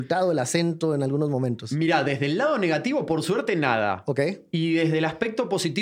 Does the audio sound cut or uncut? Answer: uncut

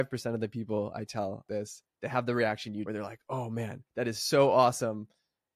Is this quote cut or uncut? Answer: cut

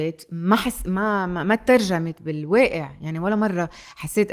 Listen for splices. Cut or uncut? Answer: uncut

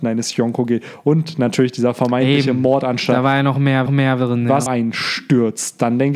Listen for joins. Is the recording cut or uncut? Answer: cut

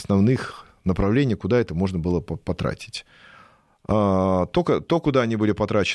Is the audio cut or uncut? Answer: uncut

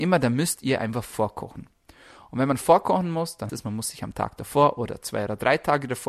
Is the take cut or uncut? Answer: cut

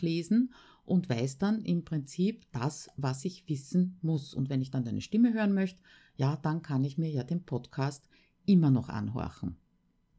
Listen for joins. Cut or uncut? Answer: uncut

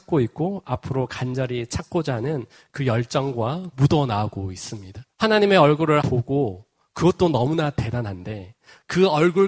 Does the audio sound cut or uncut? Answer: cut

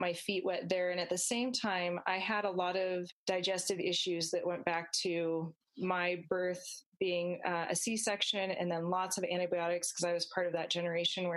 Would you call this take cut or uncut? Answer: uncut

